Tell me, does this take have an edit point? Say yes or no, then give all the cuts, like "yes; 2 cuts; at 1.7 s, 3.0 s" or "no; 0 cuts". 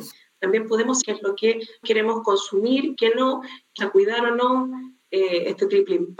yes; 4 cuts; at 1.0 s, 1.8 s, 3.0 s, 3.8 s